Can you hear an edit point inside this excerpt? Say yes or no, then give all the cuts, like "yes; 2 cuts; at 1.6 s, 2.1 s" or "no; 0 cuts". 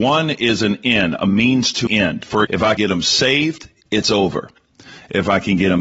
yes; 3 cuts; at 1.9 s, 2.4 s, 2.8 s